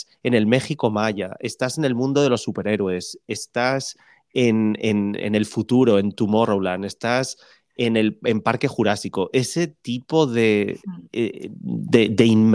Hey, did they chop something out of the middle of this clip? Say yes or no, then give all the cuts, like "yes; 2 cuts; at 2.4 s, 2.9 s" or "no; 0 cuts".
no; 0 cuts